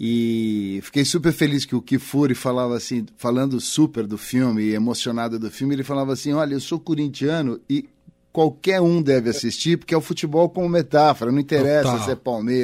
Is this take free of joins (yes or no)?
yes